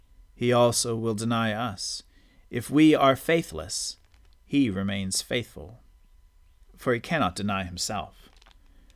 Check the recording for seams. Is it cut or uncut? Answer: uncut